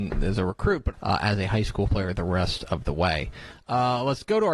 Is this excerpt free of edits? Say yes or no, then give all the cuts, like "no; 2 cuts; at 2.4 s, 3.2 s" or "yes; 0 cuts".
no; 2 cuts; at 0.9 s, 1.9 s